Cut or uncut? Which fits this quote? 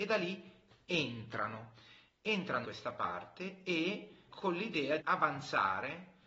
cut